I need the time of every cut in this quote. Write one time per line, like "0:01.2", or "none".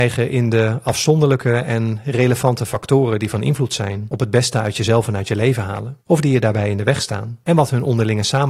0:06.0